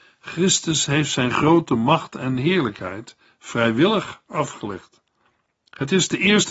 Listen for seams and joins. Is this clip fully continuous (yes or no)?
yes